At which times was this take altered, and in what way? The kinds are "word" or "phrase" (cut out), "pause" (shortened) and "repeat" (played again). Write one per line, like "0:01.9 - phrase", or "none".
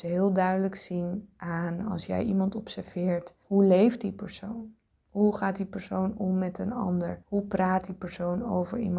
0:03.4 - pause
0:07.2 - pause